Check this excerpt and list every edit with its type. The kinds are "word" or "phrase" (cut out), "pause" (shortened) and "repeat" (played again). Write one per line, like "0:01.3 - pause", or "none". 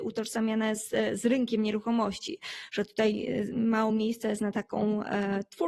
none